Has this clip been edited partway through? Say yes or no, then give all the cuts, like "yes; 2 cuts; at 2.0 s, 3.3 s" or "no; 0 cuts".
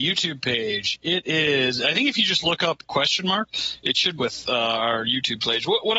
yes; 2 cuts; at 2.8 s, 4.2 s